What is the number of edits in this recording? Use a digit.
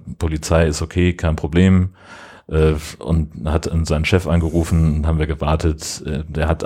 0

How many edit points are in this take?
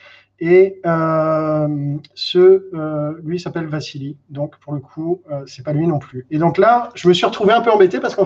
0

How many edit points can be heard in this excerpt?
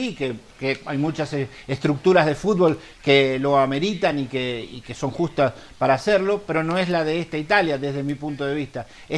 0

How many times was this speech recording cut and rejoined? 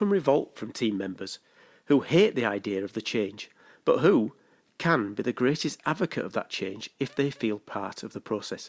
0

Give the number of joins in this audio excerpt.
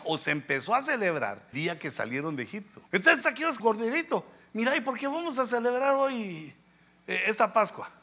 4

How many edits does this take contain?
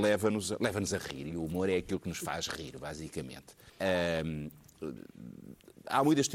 1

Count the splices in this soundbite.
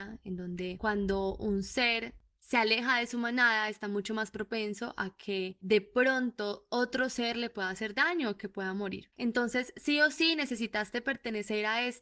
0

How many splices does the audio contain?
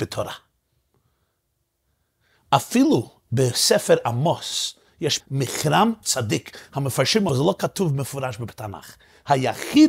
3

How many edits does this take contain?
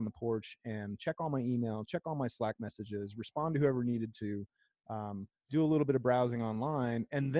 0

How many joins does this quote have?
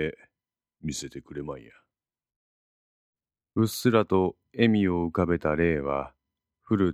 0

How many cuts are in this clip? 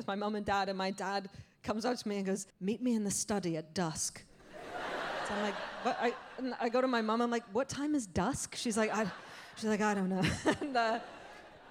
1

